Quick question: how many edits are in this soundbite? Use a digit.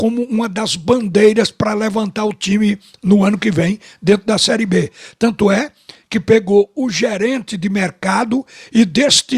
0